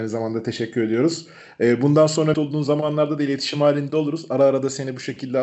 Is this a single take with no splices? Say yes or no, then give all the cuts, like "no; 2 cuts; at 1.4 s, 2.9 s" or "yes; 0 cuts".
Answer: no; 1 cut; at 2.3 s